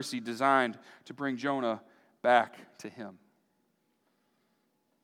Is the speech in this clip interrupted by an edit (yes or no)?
no